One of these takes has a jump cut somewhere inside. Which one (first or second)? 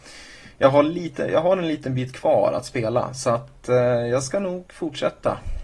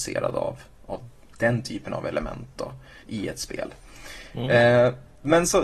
second